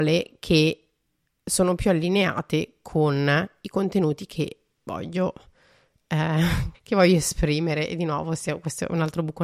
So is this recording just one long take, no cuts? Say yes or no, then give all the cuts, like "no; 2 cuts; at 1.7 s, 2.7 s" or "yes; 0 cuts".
no; 1 cut; at 6.7 s